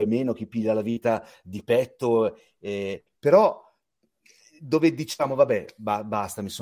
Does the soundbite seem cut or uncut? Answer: uncut